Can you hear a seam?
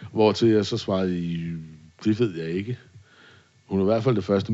no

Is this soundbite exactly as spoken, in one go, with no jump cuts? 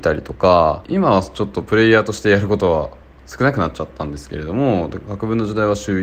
yes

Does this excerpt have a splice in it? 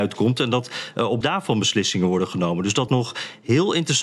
yes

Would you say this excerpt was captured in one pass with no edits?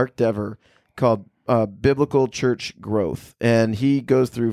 yes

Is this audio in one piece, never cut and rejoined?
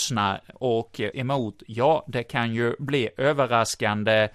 no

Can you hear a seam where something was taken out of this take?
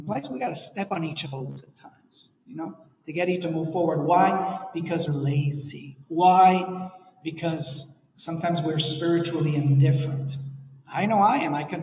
yes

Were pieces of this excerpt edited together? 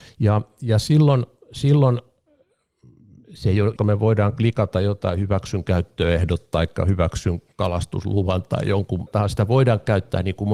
yes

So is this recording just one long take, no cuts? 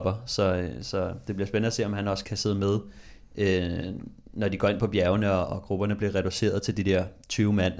no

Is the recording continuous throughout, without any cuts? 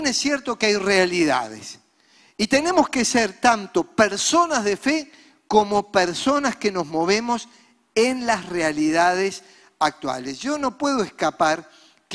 yes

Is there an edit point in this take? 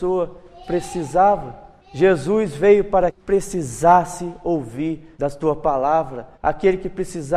yes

